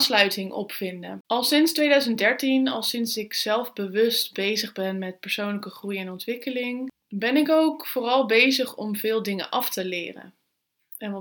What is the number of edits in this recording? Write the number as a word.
one